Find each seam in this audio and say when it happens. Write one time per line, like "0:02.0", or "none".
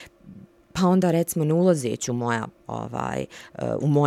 none